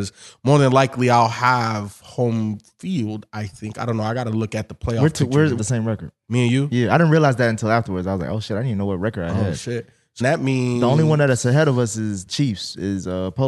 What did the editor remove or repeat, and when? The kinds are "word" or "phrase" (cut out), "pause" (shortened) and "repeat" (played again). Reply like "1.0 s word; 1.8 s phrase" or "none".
5.6 s word; 10.2 s word; 12.3 s word